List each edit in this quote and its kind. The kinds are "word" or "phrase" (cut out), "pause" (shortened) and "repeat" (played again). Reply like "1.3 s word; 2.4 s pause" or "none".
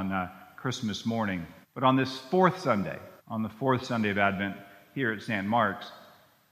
1.6 s pause; 3.2 s pause